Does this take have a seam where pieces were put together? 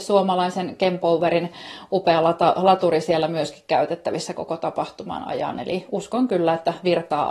no; 0 cuts

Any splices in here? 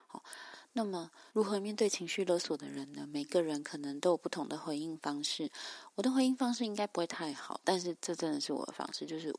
yes; 1 cut; at 1.3 s

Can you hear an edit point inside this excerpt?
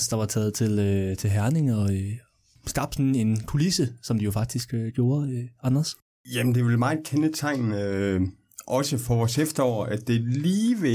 no; 0 cuts

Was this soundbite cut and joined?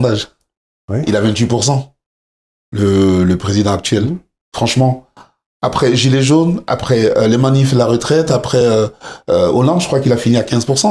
no; 0 cuts

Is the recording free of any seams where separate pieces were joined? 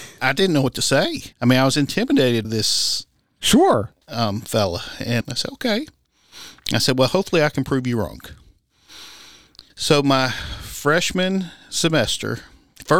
no; 5 cuts; at 1.3 s, 2.4 s, 4.0 s, 5.2 s, 9.7 s

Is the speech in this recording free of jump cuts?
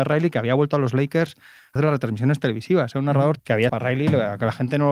no; 3 cuts; at 1.8 s, 3.4 s, 3.7 s

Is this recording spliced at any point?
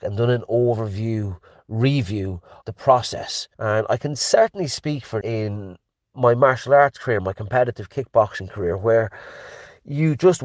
yes; 3 cuts; at 2.6 s, 3.5 s, 5.2 s

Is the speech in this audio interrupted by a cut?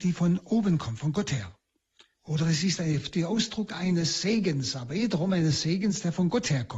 no; 0 cuts

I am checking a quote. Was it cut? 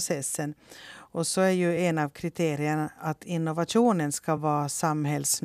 no; 0 cuts

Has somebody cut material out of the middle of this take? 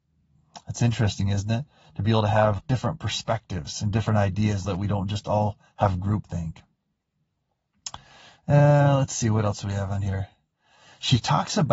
yes; 2 cuts; at 2.6 s, 4.6 s

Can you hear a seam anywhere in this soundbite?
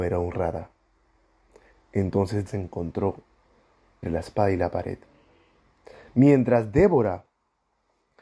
yes; 2 cuts; at 2.5 s, 4.0 s

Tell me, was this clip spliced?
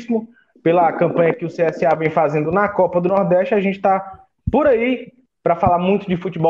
no; 0 cuts

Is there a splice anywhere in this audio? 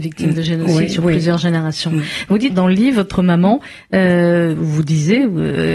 yes; 1 cut; at 2.5 s

